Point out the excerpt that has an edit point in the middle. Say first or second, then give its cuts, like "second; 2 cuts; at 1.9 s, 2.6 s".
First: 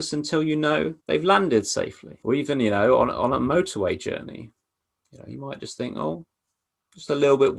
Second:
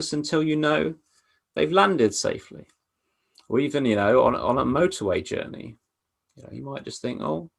first; 2 cuts; at 1.0 s, 2.2 s